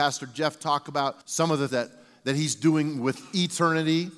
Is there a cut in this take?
yes; 2 cuts; at 1.2 s, 1.7 s

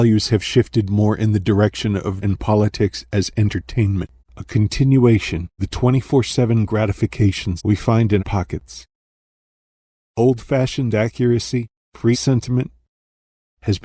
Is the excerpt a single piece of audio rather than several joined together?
no; 6 cuts; at 2.2 s, 4.2 s, 5.6 s, 7.6 s, 8.2 s, 12.1 s

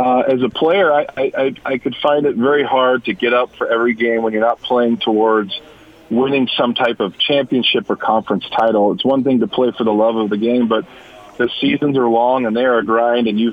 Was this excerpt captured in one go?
yes; 0 cuts

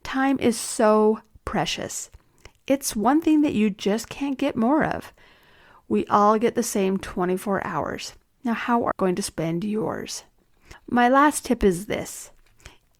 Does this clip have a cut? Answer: yes; 1 cut; at 8.9 s

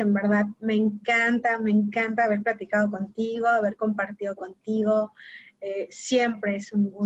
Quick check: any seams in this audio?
no; 0 cuts

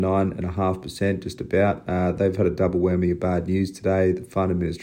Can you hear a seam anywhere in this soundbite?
no; 0 cuts

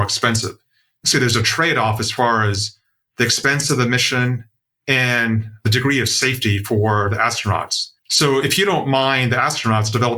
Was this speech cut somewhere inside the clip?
yes; 2 cuts; at 1.1 s, 8.0 s

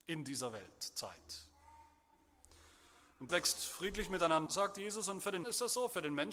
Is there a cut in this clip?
yes; 3 cuts; at 3.3 s, 4.5 s, 5.4 s

